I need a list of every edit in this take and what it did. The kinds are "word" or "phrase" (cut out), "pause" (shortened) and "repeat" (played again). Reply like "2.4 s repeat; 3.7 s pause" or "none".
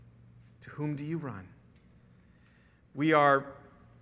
none